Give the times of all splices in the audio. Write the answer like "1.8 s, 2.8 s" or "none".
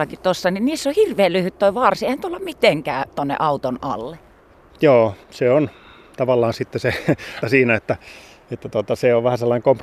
3.1 s, 5.2 s, 7.4 s

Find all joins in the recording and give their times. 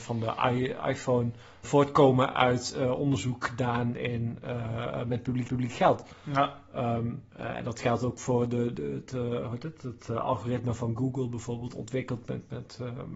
1.6 s, 5.5 s, 7.3 s

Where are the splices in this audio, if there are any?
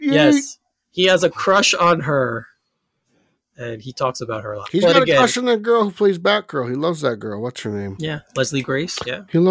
none

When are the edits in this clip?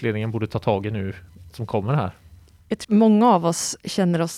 1.5 s, 2.8 s

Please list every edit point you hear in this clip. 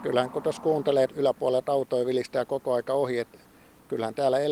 1.1 s

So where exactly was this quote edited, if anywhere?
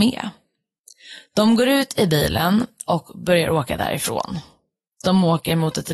none

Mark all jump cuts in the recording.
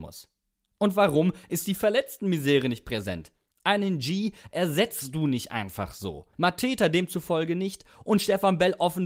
6.3 s

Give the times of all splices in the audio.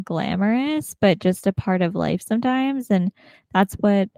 none

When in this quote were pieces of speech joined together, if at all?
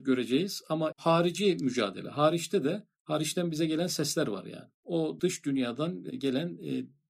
0.9 s

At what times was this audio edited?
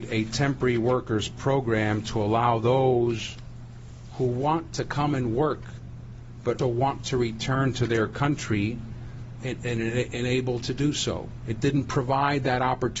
6.6 s, 9.4 s, 10.6 s

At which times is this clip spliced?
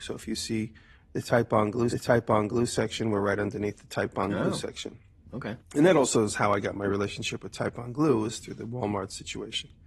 1.9 s, 5.6 s

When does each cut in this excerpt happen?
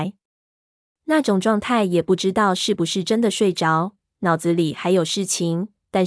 4.0 s

